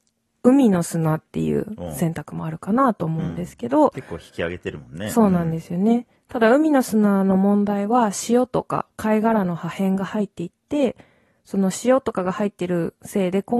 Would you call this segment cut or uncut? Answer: uncut